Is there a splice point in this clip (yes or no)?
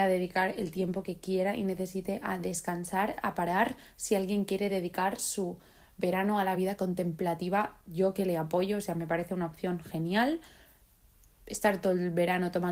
no